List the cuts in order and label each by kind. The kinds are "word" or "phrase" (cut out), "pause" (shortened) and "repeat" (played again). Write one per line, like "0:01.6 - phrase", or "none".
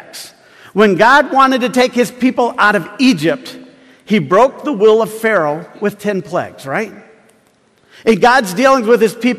none